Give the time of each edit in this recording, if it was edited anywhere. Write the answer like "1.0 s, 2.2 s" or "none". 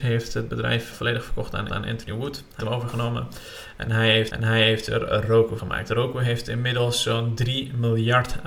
0.9 s, 1.7 s, 2.6 s, 4.3 s, 5.6 s